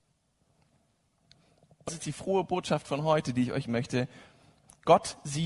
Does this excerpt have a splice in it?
yes; 2 cuts; at 1.9 s, 3.7 s

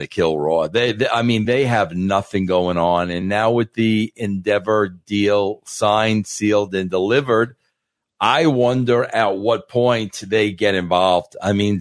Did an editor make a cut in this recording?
no; 0 cuts

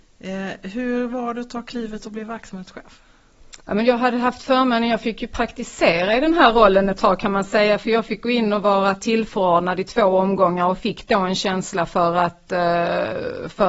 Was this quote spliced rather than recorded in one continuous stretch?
yes; 1 cut; at 3.6 s

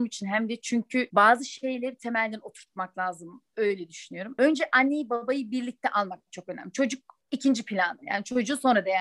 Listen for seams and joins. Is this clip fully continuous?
yes; 0 cuts

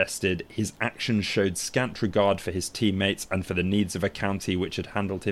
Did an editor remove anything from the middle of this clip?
no; 0 cuts

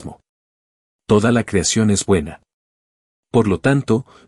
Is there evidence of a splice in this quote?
no; 0 cuts

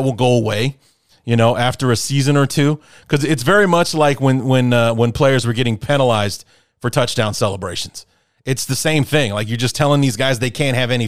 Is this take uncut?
yes; 0 cuts

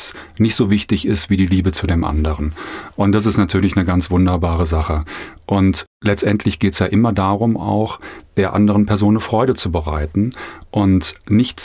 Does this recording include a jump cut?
no; 0 cuts

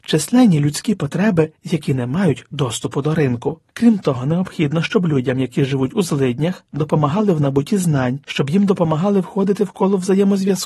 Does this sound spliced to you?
yes; 3 cuts; at 1.6 s, 3.7 s, 8.2 s

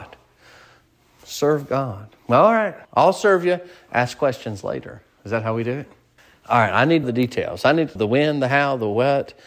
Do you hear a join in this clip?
yes; 4 cuts; at 2.8 s, 6.2 s, 7.0 s, 8.0 s

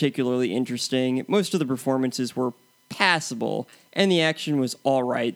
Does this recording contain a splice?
no; 0 cuts

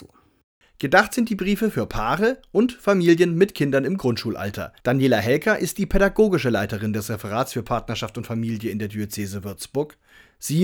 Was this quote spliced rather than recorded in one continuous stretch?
yes; 1 cut; at 4.8 s

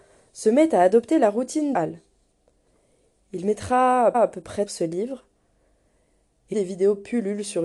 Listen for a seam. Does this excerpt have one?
yes; 4 cuts; at 1.7 s, 4.1 s, 4.7 s, 6.5 s

